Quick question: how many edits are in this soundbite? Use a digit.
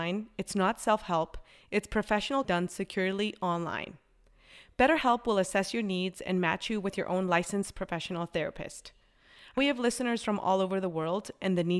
2